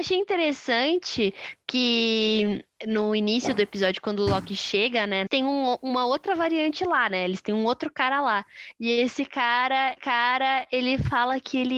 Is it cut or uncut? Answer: cut